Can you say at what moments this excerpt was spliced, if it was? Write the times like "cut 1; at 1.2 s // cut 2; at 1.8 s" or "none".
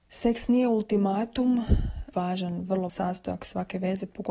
cut 1; at 2.1 s // cut 2; at 2.9 s

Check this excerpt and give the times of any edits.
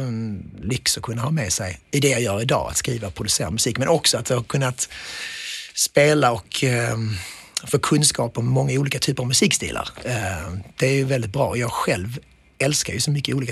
cut 1; at 1.8 s

